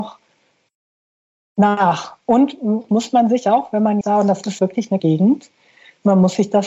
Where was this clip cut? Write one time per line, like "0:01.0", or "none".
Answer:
0:02.9
0:04.0
0:04.6
0:05.0